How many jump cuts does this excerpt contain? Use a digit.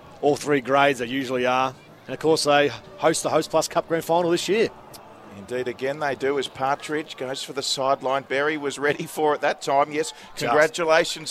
1